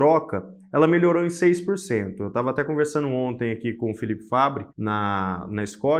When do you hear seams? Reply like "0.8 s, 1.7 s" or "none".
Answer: 4.7 s

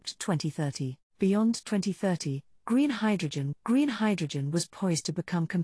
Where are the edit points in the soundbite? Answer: 1.1 s, 3.5 s

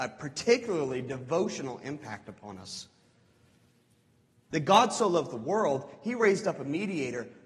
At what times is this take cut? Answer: none

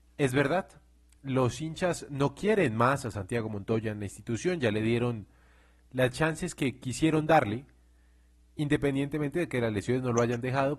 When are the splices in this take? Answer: none

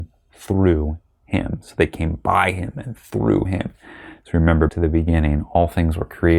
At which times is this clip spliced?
4.7 s

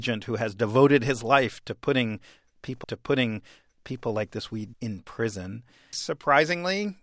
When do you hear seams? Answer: 2.8 s, 4.7 s, 5.9 s

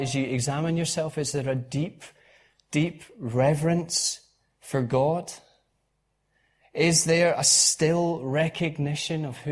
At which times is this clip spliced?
none

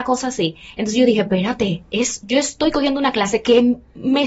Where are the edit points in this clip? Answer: none

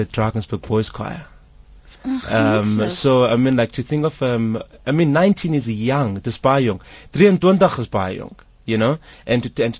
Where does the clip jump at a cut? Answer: none

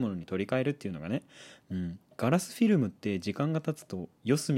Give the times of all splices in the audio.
2.1 s

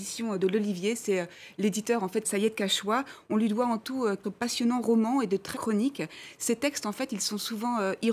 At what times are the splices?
2.2 s, 4.2 s, 5.5 s

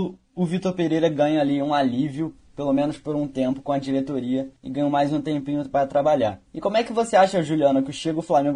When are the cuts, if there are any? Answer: 4.6 s, 6.5 s

